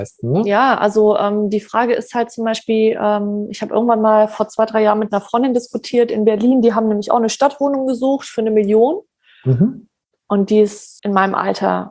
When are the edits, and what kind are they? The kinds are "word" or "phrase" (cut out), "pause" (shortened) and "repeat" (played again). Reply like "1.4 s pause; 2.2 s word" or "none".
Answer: 11.0 s word